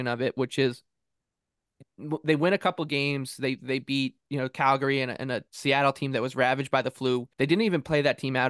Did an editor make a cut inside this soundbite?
yes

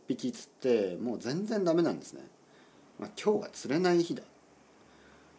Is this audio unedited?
yes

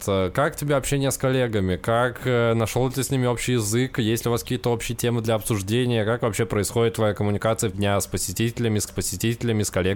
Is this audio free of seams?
no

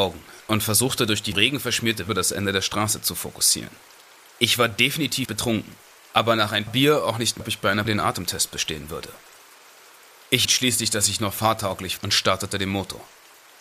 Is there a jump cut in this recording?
yes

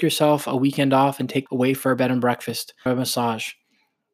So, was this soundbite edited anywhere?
yes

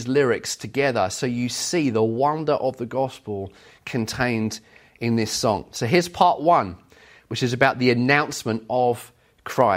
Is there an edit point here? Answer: no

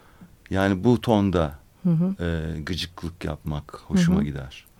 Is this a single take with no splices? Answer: yes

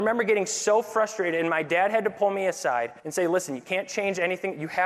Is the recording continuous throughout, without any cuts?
no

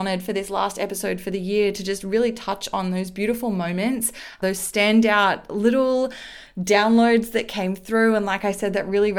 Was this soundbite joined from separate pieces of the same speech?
no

